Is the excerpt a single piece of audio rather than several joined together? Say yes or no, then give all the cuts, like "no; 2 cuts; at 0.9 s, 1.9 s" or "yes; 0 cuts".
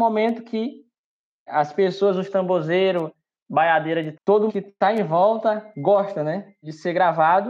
no; 3 cuts; at 3.4 s, 4.1 s, 4.5 s